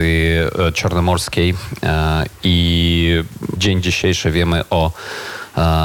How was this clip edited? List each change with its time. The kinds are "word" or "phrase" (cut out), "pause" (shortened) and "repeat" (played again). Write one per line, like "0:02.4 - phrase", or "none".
0:03.6 - word